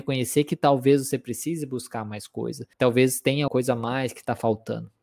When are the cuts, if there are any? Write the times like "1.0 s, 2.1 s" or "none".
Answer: 2.7 s, 3.5 s